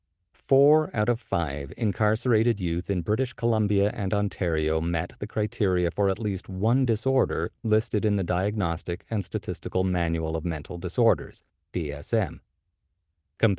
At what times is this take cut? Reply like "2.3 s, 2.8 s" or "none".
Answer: none